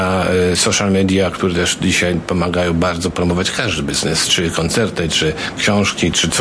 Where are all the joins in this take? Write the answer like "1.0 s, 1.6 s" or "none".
none